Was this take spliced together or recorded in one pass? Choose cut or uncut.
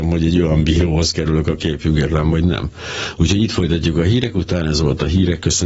uncut